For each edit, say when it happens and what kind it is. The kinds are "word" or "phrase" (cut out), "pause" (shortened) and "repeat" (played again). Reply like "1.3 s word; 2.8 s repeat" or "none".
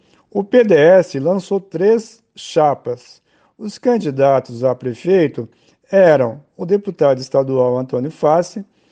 none